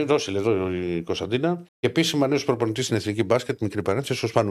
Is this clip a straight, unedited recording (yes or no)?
no